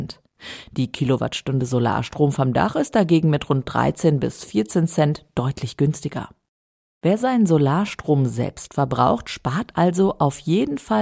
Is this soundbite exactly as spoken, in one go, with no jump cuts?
yes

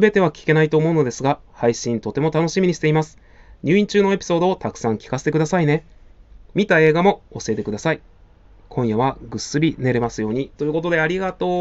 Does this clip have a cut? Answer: no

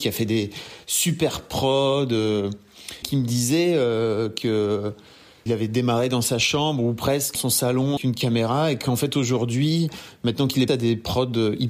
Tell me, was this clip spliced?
yes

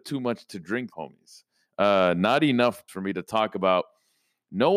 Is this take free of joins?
no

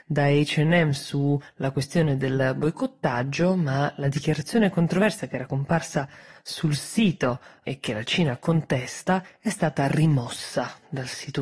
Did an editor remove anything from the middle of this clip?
no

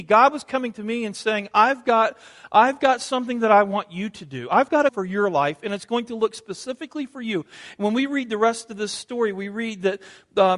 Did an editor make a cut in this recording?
yes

